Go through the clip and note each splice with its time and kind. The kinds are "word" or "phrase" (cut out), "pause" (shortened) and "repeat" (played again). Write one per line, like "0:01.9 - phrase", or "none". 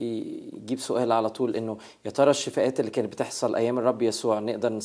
none

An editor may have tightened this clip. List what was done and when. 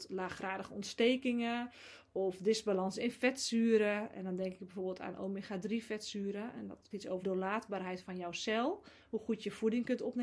0:06.9 - word
0:07.2 - word

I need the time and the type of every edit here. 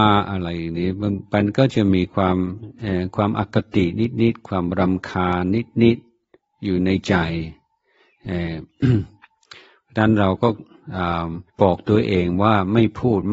0:11.5 - pause

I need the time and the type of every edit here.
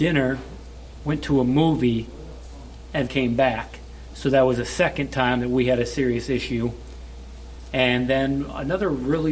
0:03.1 - word

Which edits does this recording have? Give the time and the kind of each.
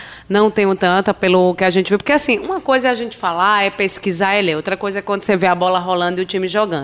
none

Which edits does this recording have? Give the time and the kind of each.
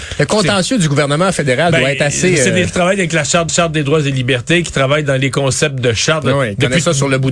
0:02.6 - word
0:03.5 - repeat

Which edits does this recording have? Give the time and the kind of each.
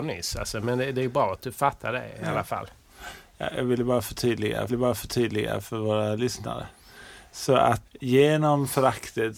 0:04.7 - repeat
0:07.9 - word

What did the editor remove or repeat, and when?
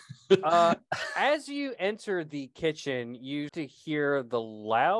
0:03.5 - word

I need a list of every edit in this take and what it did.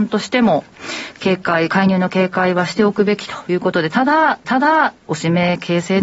0:04.4 - repeat

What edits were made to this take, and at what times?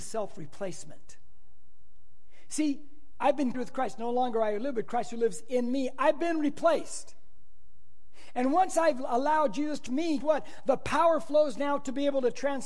0:03.5 - word
0:09.9 - word
0:10.2 - word

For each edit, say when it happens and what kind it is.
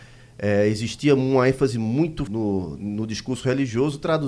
0:02.3 - phrase

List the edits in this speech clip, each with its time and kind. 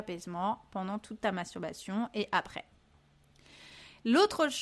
none

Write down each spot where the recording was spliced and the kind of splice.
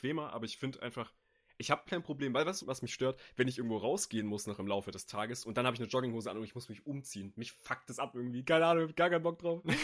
0:01.9 - word
0:02.6 - word

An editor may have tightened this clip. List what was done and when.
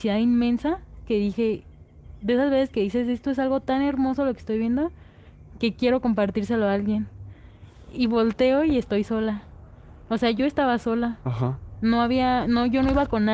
none

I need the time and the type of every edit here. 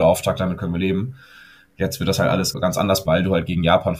0:02.5 - word
0:03.1 - word

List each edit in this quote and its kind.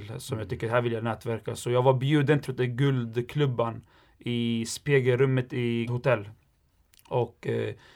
0:02.5 - word
0:05.9 - word

